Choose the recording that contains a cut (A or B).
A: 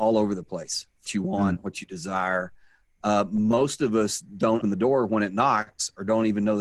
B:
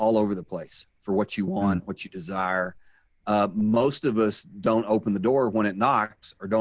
A